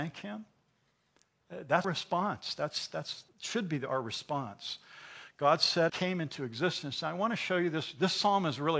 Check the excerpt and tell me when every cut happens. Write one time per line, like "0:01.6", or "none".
0:01.8
0:03.3
0:05.9